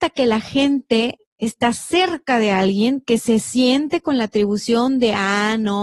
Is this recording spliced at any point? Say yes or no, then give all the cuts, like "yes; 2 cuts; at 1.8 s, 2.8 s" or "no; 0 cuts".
no; 0 cuts